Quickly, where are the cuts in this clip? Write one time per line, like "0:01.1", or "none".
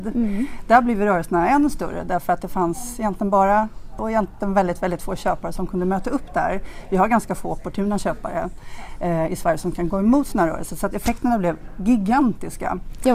0:04.0